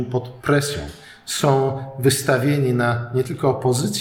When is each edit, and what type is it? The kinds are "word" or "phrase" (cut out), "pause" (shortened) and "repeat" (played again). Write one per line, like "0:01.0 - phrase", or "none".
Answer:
none